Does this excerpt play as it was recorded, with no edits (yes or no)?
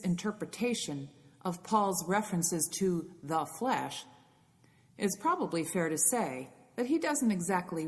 yes